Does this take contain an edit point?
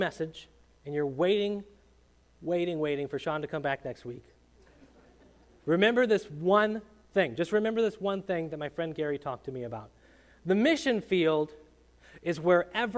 no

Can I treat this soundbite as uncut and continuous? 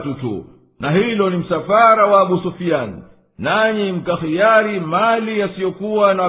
yes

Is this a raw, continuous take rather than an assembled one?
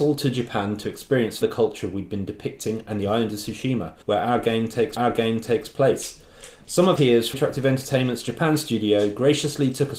no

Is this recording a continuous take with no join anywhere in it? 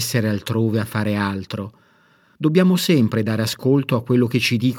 yes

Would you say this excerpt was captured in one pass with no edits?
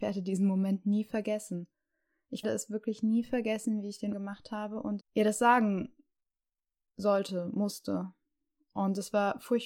no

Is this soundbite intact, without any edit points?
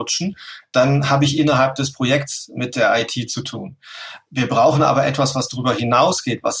yes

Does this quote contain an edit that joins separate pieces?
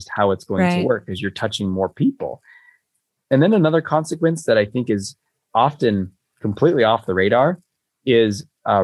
no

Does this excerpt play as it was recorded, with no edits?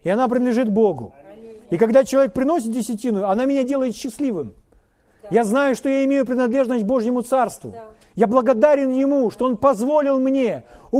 yes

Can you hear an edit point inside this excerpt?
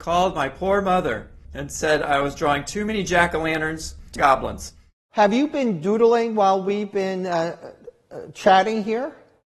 yes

